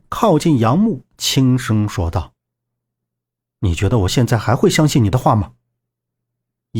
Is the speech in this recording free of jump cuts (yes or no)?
yes